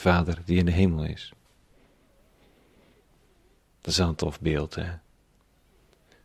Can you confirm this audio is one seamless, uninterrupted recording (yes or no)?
yes